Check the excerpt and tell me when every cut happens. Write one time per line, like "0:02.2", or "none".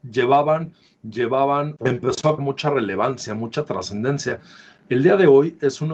0:01.8
0:02.4